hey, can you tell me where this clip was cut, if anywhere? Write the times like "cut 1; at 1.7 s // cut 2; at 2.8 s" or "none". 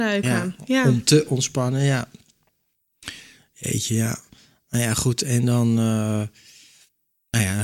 none